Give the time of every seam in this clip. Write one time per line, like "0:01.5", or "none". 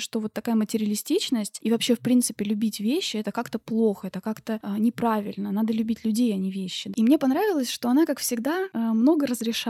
none